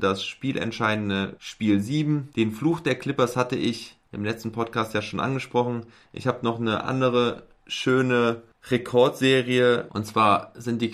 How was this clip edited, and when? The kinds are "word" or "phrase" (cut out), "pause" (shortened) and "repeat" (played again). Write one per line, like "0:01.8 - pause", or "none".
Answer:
none